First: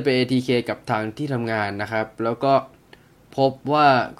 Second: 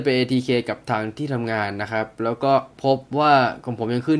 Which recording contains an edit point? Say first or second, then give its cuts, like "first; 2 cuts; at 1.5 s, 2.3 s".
second; 1 cut; at 2.7 s